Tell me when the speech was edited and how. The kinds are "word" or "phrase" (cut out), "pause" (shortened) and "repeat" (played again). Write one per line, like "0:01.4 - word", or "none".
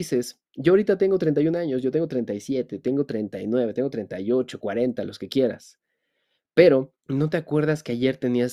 0:07.0 - pause